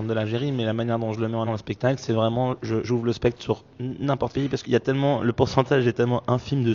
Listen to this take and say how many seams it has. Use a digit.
4